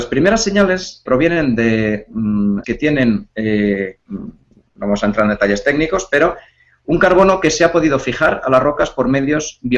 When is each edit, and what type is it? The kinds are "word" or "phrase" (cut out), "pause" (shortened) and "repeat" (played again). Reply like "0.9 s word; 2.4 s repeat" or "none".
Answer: 1.1 s word; 2.6 s word; 4.0 s word